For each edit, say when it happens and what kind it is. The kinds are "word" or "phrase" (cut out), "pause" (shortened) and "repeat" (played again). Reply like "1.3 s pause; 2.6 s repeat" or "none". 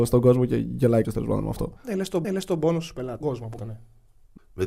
1.0 s word; 1.8 s pause; 2.2 s repeat; 3.2 s word; 3.6 s word